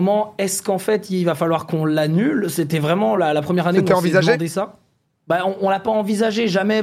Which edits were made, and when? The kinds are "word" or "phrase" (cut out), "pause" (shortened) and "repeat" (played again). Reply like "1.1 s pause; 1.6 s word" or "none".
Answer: none

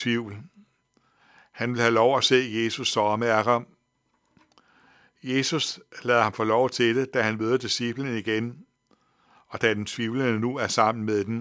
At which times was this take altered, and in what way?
none

